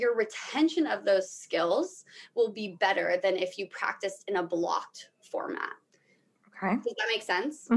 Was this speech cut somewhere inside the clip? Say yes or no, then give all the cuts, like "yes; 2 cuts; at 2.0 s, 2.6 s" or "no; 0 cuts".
no; 0 cuts